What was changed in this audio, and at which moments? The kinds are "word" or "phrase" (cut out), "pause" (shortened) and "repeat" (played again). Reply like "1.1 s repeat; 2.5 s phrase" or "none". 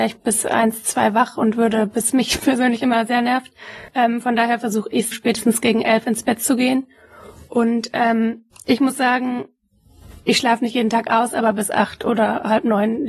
2.1 s phrase; 3.9 s pause; 5.1 s word; 8.5 s pause